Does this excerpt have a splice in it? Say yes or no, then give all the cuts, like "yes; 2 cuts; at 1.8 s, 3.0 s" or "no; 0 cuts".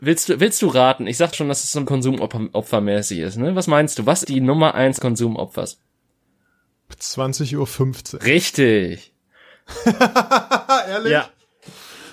yes; 5 cuts; at 1.3 s, 1.9 s, 3.7 s, 4.2 s, 5.0 s